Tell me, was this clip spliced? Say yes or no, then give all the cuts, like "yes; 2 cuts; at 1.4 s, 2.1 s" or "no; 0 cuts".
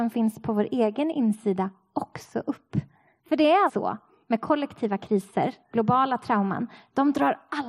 yes; 1 cut; at 3.7 s